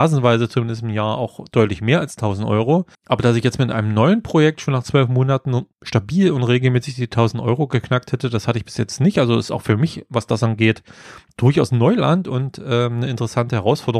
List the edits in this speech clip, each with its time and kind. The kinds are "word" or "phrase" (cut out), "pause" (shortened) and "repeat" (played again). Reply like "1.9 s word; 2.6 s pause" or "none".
2.9 s pause; 5.7 s pause